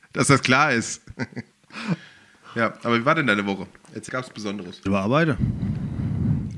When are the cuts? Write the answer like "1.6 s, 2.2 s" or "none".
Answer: 1.5 s, 4.1 s, 4.9 s